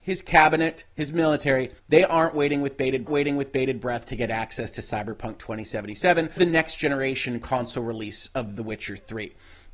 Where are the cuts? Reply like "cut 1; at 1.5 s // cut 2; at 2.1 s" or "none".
cut 1; at 1.8 s // cut 2; at 3.1 s // cut 3; at 6.4 s